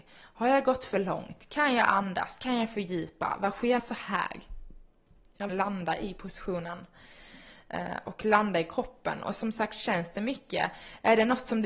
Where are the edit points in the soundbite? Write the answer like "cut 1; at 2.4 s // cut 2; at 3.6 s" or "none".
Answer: cut 1; at 3.8 s // cut 2; at 5.5 s